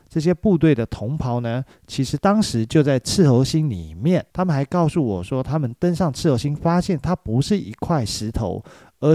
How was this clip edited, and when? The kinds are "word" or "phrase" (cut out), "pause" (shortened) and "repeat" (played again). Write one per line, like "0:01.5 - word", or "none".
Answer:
0:04.3 - pause